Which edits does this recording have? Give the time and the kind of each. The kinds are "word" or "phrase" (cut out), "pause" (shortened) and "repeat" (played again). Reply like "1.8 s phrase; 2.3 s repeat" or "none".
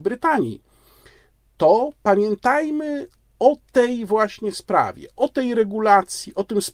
none